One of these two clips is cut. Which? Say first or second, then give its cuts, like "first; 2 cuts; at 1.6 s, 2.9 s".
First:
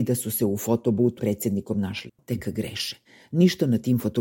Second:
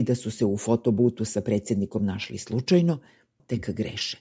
first; 3 cuts; at 1.2 s, 2.1 s, 3.0 s